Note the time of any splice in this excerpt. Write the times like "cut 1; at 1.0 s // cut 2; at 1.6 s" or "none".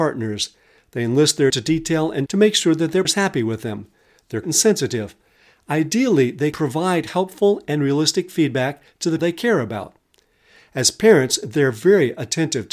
cut 1; at 1.5 s // cut 2; at 2.3 s // cut 3; at 3.0 s // cut 4; at 4.4 s // cut 5; at 6.5 s // cut 6; at 9.2 s